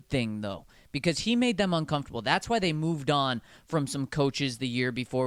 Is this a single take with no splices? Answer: yes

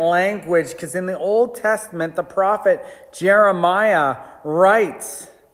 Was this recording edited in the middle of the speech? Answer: no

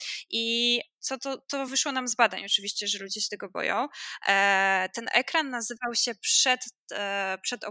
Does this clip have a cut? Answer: no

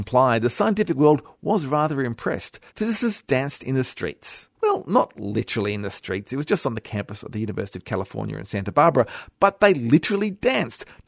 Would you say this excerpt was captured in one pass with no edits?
no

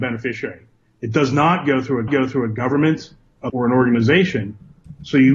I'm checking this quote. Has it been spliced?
yes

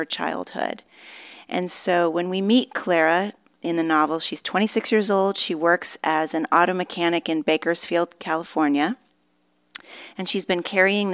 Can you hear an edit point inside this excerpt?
no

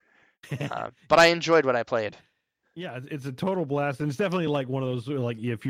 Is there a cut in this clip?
no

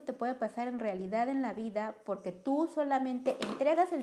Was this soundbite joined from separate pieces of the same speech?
no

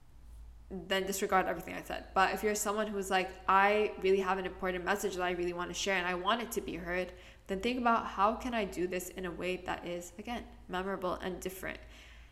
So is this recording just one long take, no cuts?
yes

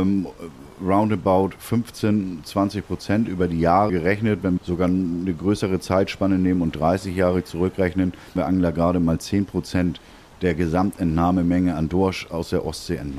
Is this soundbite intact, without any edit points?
no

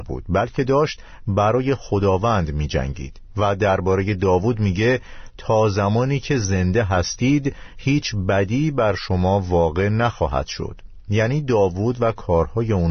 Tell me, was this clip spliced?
no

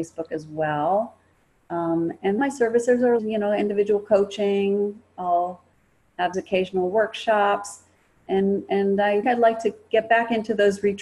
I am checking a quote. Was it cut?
yes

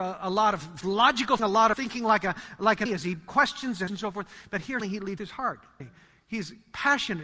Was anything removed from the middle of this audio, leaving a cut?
yes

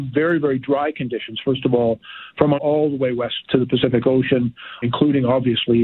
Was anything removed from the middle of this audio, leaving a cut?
yes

